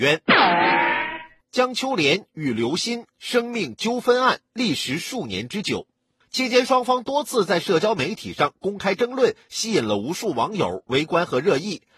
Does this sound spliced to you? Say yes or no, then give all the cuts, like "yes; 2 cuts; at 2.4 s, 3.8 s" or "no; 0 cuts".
no; 0 cuts